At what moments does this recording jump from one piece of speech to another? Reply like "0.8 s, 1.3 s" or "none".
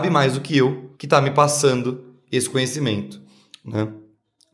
0.9 s